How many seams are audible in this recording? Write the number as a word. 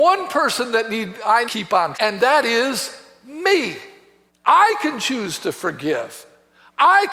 three